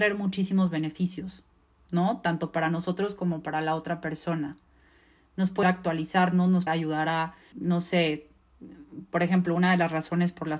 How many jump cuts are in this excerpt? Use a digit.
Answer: 3